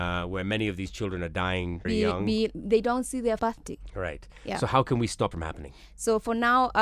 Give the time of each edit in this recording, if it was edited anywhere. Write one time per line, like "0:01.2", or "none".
0:01.8
0:03.4
0:05.3